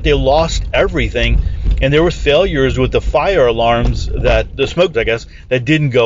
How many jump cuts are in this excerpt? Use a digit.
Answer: 3